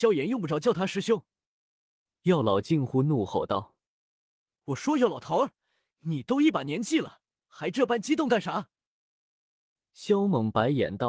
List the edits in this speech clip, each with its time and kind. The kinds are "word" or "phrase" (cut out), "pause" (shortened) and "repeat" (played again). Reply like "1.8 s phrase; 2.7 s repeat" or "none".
none